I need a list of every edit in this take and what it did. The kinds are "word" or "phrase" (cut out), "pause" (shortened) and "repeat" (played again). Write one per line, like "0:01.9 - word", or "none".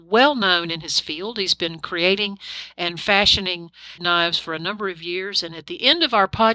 0:04.0 - word

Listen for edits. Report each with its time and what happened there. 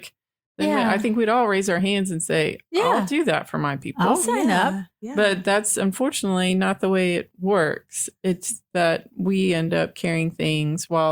none

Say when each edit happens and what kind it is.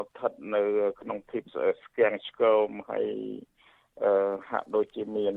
none

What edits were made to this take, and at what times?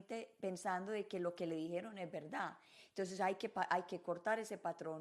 none

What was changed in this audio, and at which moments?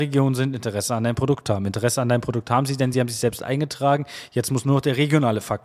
none

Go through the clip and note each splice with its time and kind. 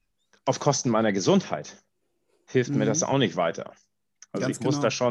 none

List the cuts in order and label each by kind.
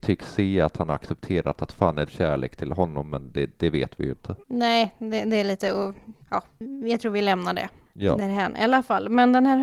0:02.1 - phrase
0:04.4 - pause
0:06.2 - pause
0:07.9 - pause

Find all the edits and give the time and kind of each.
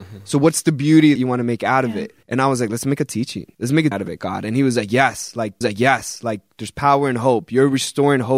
0:01.2 - word
0:02.2 - pause
0:03.5 - pause
0:03.9 - word
0:05.6 - repeat

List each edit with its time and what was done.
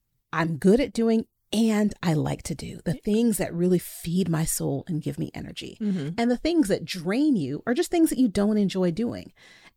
none

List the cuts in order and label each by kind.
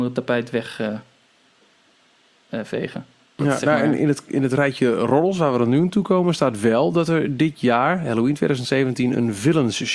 none

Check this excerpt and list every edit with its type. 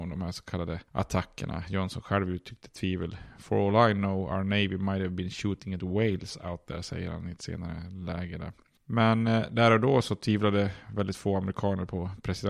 none

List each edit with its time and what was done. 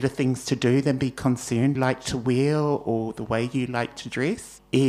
0:01.8 - phrase

